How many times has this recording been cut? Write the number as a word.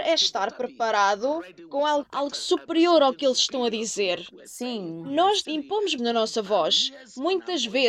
three